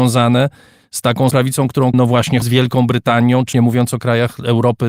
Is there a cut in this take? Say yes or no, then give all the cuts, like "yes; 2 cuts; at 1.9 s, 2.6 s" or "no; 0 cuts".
yes; 4 cuts; at 1.3 s, 1.9 s, 2.4 s, 3.5 s